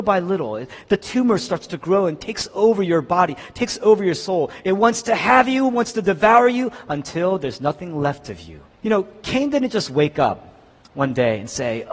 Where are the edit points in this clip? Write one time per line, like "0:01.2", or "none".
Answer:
0:08.7